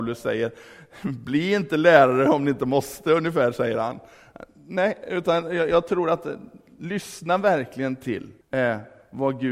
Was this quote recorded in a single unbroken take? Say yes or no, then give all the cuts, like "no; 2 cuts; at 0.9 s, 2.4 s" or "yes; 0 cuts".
no; 1 cut; at 8.4 s